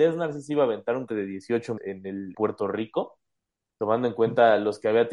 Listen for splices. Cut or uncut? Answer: cut